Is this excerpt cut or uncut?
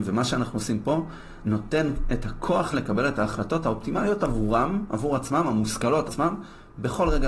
cut